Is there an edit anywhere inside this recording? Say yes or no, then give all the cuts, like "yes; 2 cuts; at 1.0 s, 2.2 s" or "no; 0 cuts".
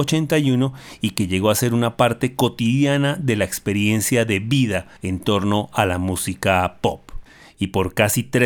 yes; 1 cut; at 5.0 s